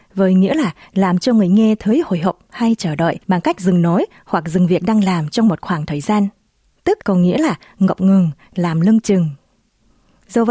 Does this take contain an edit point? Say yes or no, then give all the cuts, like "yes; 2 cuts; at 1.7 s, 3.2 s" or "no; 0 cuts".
yes; 2 cuts; at 3.2 s, 7.0 s